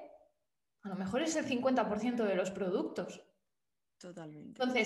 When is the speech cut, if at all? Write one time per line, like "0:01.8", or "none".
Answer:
none